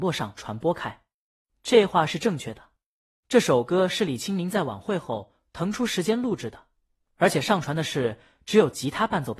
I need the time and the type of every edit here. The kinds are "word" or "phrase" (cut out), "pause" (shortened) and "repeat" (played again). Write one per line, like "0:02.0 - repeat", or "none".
none